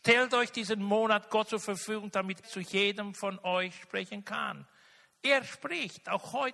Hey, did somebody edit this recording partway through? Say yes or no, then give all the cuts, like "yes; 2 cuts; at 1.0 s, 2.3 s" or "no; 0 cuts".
yes; 1 cut; at 2.4 s